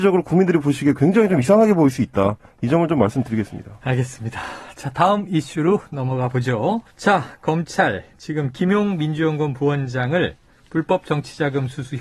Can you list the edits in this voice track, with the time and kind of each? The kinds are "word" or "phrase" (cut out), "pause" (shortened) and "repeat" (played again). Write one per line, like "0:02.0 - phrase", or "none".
0:06.9 - pause